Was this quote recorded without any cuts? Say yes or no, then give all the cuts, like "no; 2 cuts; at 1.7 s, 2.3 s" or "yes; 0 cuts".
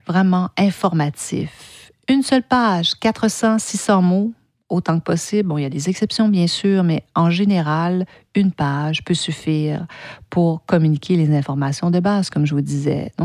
yes; 0 cuts